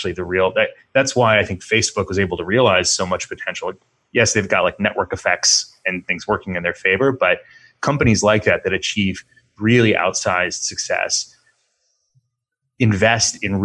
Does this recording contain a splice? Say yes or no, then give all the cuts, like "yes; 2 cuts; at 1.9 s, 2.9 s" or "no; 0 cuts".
no; 0 cuts